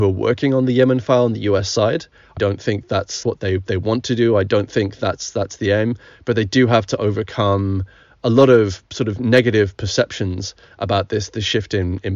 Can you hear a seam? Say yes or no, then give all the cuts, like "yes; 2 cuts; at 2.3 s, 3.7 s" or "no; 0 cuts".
yes; 2 cuts; at 2.4 s, 3.2 s